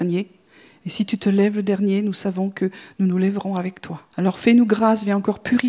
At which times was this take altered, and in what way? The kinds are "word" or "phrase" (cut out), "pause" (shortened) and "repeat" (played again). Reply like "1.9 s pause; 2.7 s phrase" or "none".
4.1 s pause